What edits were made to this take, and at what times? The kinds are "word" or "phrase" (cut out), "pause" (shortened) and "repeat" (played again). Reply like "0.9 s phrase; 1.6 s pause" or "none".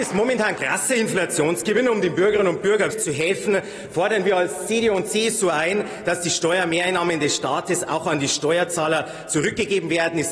2.9 s word